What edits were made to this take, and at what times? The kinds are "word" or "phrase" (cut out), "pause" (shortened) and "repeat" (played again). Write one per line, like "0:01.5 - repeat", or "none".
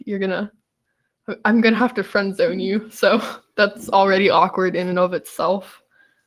none